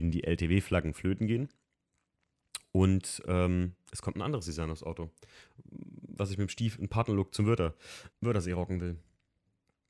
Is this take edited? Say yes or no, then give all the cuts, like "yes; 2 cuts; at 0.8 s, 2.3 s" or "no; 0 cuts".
yes; 1 cut; at 8.1 s